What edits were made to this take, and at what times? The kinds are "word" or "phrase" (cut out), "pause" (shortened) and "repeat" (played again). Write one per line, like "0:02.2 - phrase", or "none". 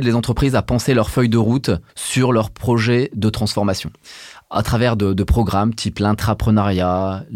0:01.9 - pause